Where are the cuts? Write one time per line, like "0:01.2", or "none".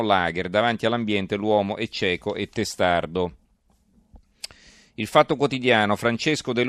none